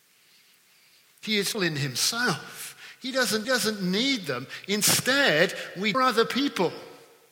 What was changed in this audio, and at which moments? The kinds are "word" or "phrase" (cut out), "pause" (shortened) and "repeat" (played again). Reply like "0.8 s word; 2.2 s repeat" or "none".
1.5 s phrase; 3.4 s repeat; 5.9 s phrase